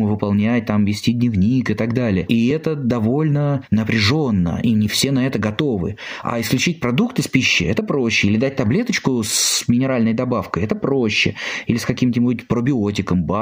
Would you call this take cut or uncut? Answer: uncut